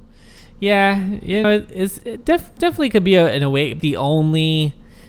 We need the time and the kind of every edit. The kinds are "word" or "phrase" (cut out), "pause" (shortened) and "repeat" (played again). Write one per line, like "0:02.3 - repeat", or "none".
0:01.4 - word
0:02.0 - word
0:03.8 - phrase